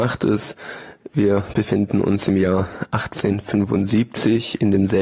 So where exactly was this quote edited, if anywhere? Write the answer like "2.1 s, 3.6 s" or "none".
none